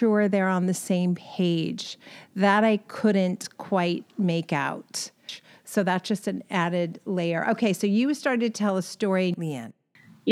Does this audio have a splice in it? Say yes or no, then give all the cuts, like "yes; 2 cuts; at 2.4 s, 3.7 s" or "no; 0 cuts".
no; 0 cuts